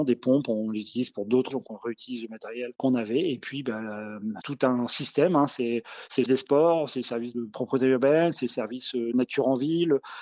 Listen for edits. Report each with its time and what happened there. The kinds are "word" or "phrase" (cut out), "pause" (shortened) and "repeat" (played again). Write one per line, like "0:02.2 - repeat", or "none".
0:01.5 - word
0:04.4 - word
0:06.3 - word